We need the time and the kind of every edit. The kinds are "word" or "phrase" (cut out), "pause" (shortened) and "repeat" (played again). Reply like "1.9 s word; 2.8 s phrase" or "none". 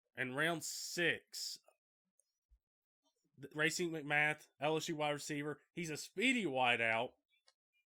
3.5 s phrase; 4.5 s pause